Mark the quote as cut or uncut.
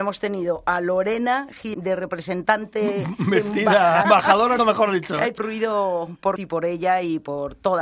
cut